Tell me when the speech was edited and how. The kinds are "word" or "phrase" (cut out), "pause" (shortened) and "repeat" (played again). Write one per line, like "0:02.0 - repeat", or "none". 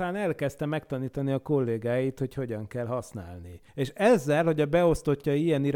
0:03.7 - pause